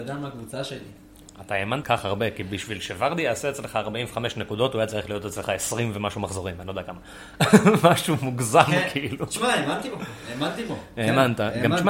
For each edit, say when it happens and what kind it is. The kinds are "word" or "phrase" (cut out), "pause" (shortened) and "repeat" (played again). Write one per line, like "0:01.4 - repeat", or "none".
0:01.8 - phrase